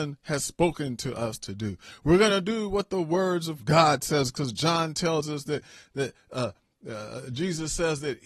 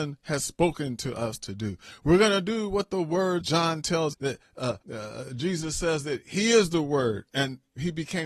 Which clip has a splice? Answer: second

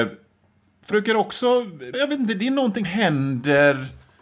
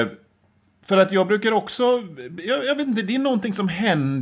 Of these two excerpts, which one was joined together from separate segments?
first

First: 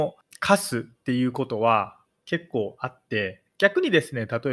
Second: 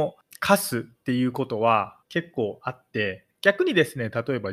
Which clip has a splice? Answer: second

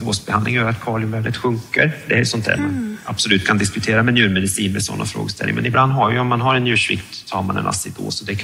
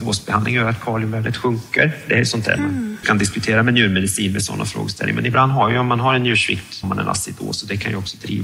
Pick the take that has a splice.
second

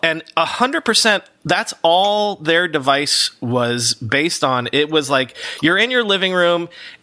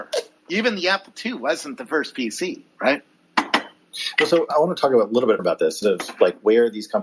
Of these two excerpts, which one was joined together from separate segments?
second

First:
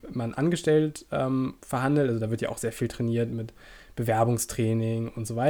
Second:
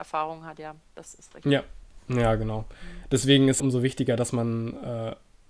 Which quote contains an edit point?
second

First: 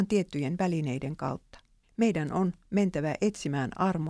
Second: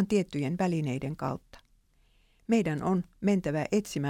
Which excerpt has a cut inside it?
first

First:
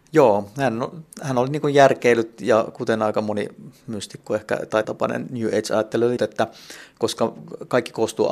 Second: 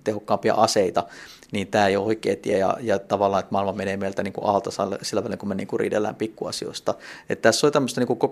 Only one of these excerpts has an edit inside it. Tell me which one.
first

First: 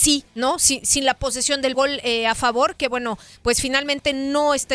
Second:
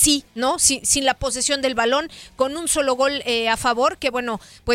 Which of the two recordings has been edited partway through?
first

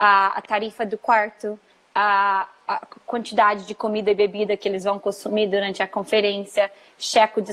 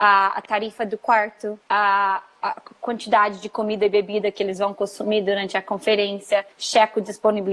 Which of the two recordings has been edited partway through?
second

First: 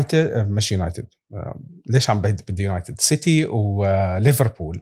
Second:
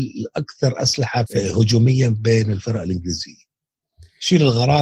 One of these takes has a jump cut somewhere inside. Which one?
second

